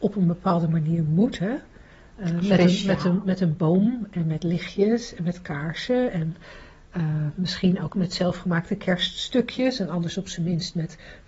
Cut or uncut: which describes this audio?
uncut